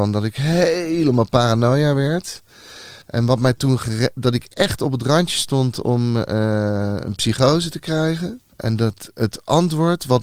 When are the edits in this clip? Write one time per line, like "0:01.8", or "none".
0:03.0
0:08.5